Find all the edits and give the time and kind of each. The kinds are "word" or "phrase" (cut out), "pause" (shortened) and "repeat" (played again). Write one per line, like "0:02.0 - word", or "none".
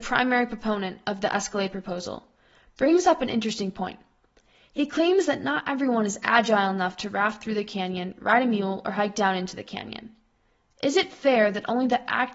none